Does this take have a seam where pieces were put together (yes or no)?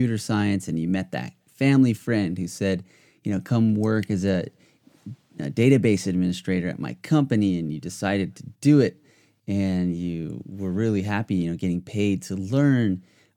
no